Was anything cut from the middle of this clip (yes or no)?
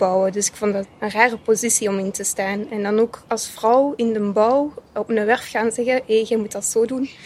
no